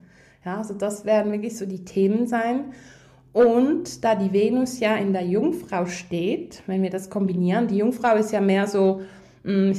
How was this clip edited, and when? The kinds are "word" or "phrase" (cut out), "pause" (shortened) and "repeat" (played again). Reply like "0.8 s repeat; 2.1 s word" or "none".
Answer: none